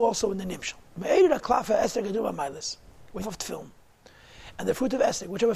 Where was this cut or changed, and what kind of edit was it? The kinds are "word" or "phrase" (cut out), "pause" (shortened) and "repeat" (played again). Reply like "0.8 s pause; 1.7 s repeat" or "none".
3.2 s phrase